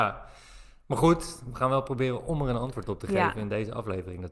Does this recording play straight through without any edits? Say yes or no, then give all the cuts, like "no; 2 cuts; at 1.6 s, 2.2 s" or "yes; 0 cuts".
yes; 0 cuts